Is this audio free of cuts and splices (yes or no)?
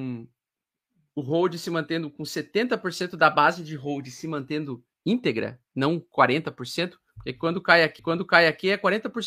no